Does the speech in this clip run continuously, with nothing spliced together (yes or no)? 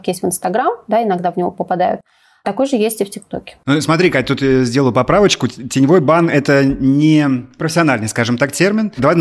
yes